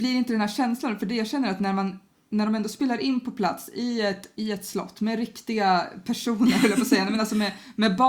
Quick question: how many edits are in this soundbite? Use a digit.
0